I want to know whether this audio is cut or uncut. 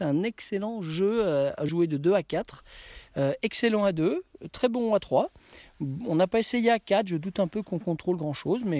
cut